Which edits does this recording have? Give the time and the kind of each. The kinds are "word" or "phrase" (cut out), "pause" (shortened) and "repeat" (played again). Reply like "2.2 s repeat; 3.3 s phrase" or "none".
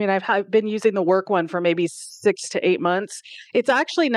none